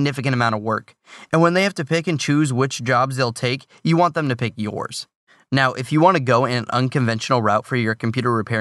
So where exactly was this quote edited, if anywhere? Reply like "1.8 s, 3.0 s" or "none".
none